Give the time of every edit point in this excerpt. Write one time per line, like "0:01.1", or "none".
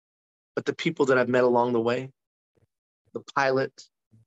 none